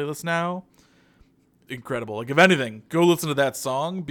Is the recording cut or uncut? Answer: cut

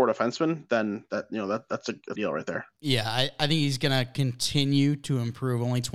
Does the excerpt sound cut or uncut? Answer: cut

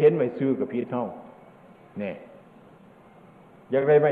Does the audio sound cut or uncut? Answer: uncut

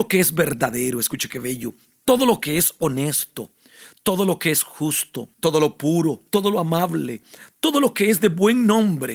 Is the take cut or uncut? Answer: cut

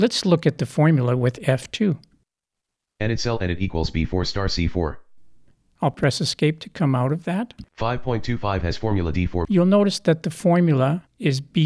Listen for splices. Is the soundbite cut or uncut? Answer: uncut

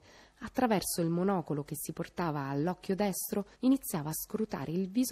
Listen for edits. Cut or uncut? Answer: cut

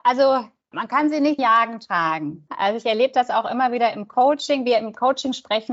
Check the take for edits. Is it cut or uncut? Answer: cut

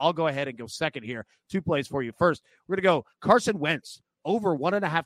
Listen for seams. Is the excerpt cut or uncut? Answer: cut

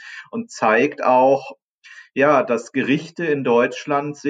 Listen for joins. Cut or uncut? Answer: uncut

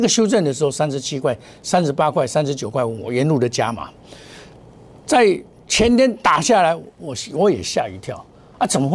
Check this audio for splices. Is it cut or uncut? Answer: uncut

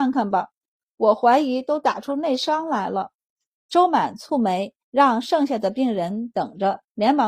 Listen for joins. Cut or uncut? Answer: cut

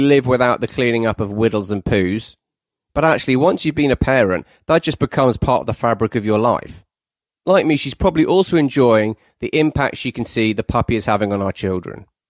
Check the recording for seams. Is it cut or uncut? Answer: uncut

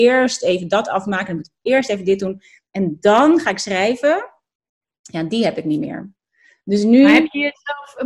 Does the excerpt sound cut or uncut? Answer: uncut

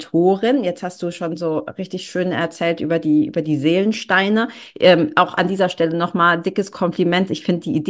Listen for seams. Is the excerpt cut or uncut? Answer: uncut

